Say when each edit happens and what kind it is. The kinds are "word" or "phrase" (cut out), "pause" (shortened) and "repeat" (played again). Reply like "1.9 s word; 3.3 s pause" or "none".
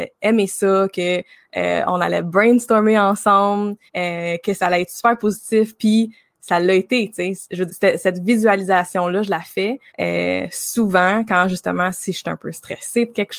3.9 s pause; 7.7 s word; 9.9 s pause